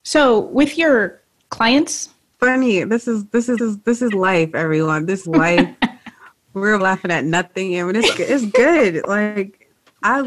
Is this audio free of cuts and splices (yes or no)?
no